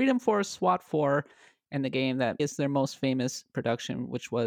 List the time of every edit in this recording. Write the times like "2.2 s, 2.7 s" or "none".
2.4 s